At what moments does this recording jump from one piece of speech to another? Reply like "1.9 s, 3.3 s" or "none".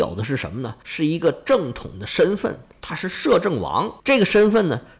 4.0 s